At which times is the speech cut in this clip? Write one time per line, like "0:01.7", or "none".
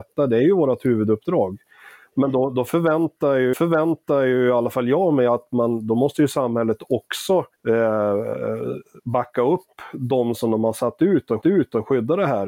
0:03.5
0:07.5
0:11.4